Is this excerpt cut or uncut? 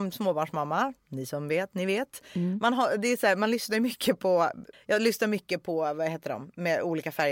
cut